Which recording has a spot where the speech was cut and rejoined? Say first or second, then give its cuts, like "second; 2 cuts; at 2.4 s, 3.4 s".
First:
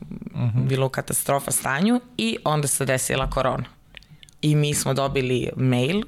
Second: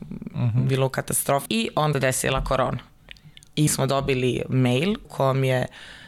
second; 4 cuts; at 1.5 s, 1.9 s, 3.7 s, 5.0 s